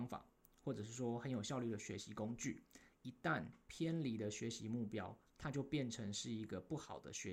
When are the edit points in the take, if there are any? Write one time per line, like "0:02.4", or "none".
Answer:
0:05.3